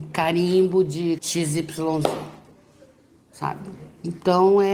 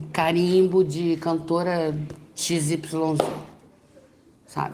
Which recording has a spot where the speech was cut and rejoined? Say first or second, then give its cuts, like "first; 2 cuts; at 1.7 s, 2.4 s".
first; 1 cut; at 1.2 s